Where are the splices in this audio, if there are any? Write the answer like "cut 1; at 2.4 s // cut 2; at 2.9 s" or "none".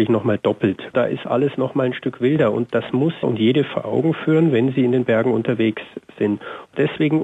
cut 1; at 3.2 s